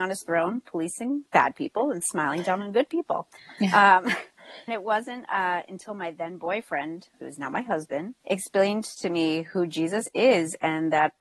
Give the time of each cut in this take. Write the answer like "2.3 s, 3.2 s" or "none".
4.7 s, 7.1 s, 8.2 s

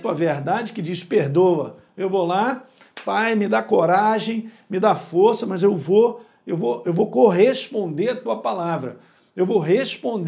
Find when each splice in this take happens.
none

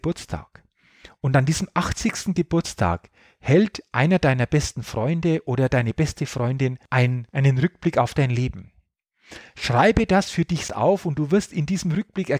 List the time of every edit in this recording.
10.7 s

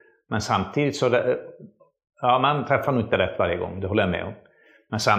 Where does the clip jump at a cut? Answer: none

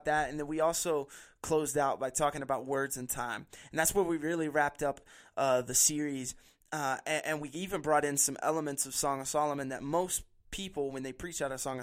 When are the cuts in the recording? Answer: none

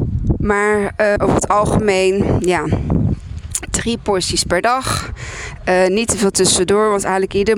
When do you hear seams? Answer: 1.2 s

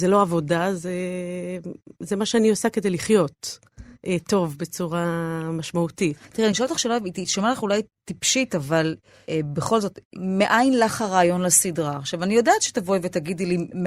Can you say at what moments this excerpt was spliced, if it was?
none

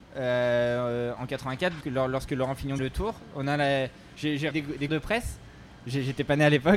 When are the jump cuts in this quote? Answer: 1.2 s, 1.8 s, 2.8 s, 4.5 s, 4.9 s

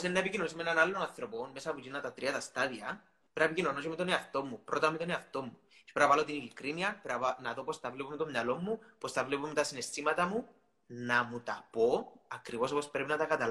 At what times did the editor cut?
none

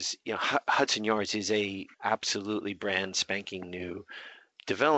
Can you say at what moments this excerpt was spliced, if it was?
1.9 s

